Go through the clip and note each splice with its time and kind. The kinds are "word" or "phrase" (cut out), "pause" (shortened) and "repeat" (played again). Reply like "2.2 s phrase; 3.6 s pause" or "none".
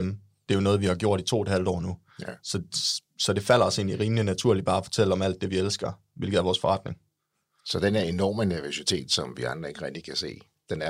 none